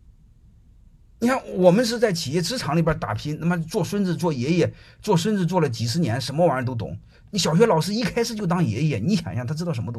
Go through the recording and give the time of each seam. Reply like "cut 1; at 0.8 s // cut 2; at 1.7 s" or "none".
none